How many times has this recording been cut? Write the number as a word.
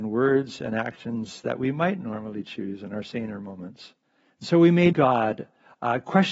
three